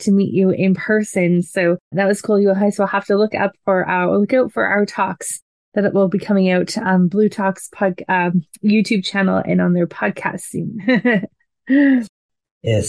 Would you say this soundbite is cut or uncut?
cut